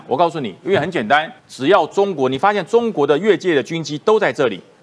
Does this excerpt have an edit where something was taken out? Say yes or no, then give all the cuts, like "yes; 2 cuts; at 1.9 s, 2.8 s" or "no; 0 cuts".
yes; 1 cut; at 1.4 s